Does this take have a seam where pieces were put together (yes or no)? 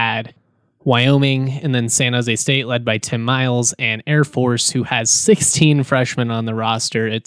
no